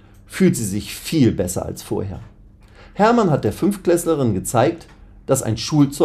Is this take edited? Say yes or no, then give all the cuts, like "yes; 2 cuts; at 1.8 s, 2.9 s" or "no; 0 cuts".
no; 0 cuts